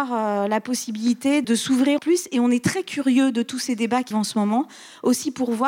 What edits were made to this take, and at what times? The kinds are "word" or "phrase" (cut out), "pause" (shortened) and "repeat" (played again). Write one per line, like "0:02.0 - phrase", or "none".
0:01.4 - word
0:02.0 - word
0:04.1 - word